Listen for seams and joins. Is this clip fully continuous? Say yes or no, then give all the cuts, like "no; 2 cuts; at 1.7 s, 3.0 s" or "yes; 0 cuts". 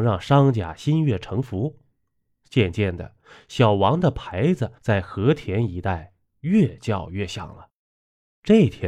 no; 1 cut; at 4.8 s